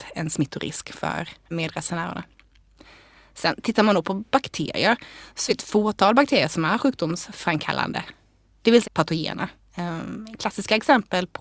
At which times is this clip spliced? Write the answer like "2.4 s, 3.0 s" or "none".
5.5 s, 8.8 s